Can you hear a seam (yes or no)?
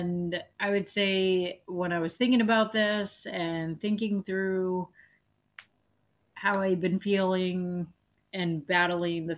no